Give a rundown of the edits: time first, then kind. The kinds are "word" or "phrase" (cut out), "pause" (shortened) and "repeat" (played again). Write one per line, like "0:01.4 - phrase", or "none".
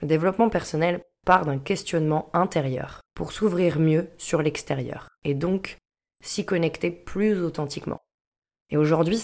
0:03.1 - pause
0:05.2 - pause